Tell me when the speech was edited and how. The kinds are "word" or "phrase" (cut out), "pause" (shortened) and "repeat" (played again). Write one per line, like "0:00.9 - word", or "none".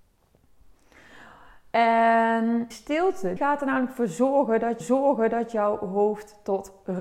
0:02.7 - word
0:03.4 - word
0:04.8 - repeat